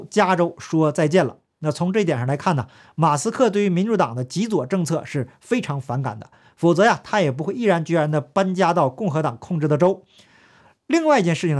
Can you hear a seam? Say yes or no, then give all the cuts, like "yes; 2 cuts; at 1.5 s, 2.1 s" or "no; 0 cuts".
no; 0 cuts